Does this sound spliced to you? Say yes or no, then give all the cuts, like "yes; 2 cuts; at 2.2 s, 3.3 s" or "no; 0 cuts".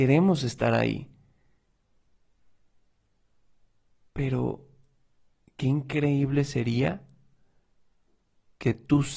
no; 0 cuts